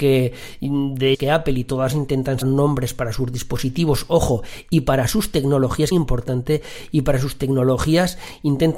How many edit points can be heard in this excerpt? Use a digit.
4